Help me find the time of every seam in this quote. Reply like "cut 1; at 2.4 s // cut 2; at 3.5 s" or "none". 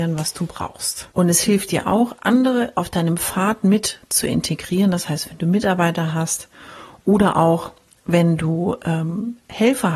cut 1; at 1.1 s